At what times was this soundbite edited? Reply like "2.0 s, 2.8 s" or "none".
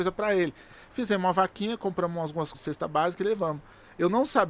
2.5 s